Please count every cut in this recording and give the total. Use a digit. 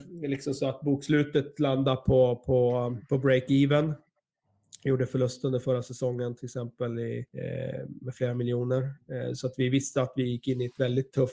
2